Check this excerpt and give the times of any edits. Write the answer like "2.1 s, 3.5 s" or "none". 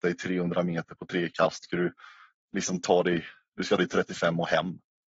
1.6 s, 3.8 s